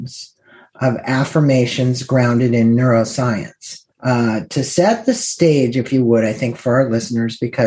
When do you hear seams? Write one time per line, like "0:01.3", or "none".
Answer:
0:03.9